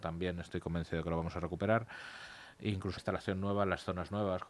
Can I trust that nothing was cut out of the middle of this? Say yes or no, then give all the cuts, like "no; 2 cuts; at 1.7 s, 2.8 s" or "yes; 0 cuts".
no; 1 cut; at 3.0 s